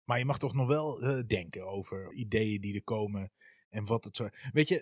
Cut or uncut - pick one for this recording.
cut